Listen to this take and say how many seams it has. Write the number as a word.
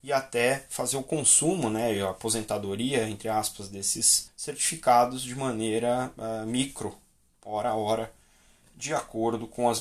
one